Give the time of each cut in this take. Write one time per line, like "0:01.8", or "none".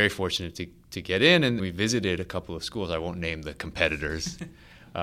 0:01.6